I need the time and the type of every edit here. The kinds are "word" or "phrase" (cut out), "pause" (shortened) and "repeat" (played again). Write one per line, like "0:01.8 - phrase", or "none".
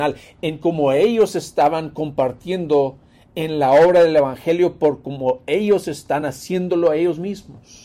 none